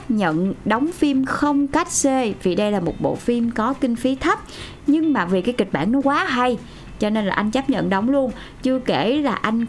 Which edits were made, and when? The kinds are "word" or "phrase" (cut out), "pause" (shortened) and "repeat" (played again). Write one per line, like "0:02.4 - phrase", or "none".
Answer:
none